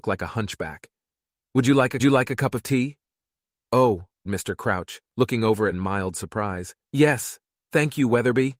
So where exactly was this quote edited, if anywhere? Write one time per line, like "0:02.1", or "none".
0:02.0
0:04.3
0:05.0
0:05.7
0:06.8